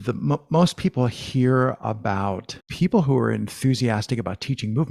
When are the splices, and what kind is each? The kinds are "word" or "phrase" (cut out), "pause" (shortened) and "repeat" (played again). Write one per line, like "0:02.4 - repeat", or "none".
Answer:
0:02.6 - pause